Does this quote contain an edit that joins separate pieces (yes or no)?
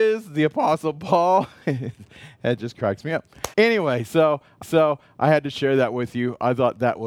yes